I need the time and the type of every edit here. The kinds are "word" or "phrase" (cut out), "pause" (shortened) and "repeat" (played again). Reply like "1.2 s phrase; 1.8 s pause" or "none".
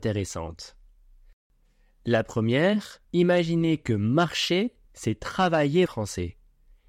3.0 s pause; 4.8 s pause; 5.9 s word